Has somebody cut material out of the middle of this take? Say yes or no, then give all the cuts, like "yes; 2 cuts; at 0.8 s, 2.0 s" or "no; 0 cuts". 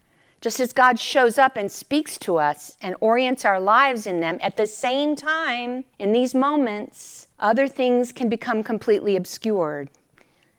yes; 2 cuts; at 5.9 s, 7.3 s